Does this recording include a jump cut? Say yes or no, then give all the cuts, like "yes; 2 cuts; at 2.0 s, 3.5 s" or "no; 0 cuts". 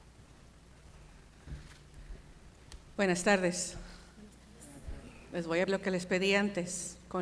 yes; 1 cut; at 5.7 s